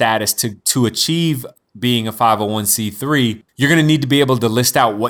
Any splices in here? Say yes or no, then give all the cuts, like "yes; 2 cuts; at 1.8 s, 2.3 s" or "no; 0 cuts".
yes; 1 cut; at 3.5 s